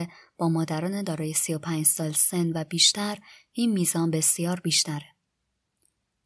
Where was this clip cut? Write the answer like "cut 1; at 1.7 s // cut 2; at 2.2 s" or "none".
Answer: none